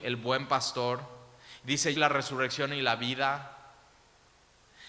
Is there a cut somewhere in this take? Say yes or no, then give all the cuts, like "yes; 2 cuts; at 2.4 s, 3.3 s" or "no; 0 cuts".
yes; 1 cut; at 2.0 s